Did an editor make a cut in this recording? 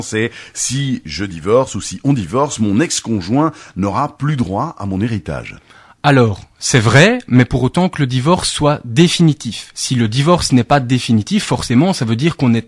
no; 0 cuts

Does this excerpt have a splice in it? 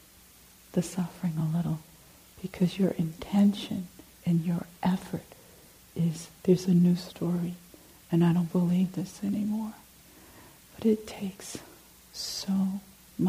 no; 0 cuts

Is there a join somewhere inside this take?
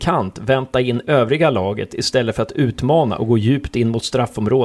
no; 0 cuts

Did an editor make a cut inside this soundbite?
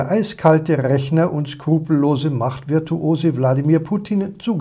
no; 0 cuts

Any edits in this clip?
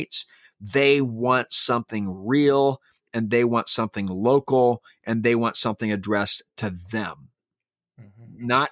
no; 0 cuts

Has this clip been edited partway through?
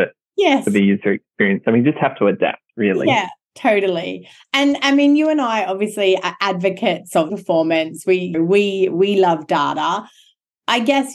yes; 4 cuts; at 2.7 s, 3.4 s, 7.3 s, 8.3 s

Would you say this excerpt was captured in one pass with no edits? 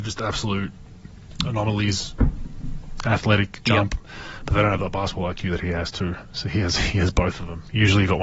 yes; 0 cuts

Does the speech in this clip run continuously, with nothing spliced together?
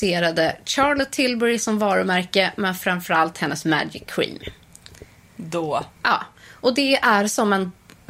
no; 1 cut; at 6.0 s

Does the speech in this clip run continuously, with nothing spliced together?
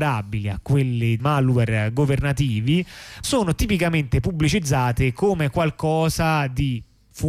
no; 2 cuts; at 1.2 s, 3.2 s

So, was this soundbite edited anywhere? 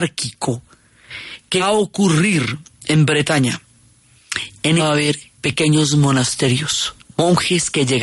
yes; 4 cuts; at 1.6 s, 4.8 s, 5.3 s, 7.0 s

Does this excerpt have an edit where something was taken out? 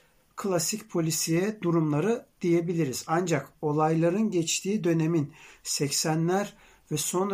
no; 0 cuts

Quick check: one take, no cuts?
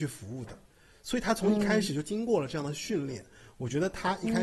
yes; 0 cuts

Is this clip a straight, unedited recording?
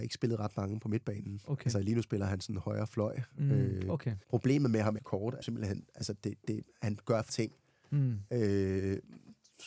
no; 4 cuts; at 4.2 s, 5.0 s, 5.4 s, 7.3 s

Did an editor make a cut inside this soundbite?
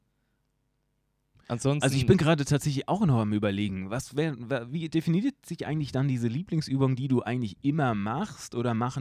no; 0 cuts

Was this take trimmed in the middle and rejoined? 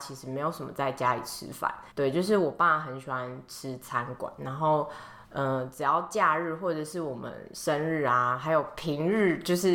yes; 2 cuts; at 1.9 s, 5.2 s

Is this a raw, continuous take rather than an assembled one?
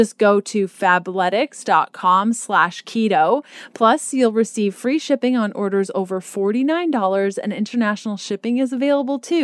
yes; 0 cuts

